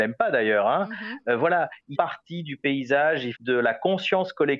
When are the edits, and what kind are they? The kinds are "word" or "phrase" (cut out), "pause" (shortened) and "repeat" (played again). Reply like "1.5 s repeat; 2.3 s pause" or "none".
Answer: 1.9 s word; 3.3 s phrase